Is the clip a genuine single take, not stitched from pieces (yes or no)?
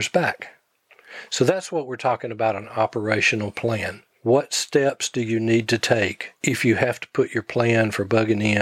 yes